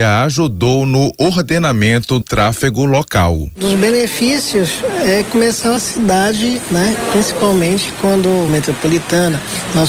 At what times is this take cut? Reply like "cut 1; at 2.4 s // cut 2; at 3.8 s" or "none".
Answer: cut 1; at 2.2 s // cut 2; at 5.8 s // cut 3; at 8.5 s